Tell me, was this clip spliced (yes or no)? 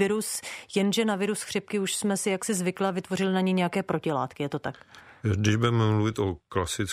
no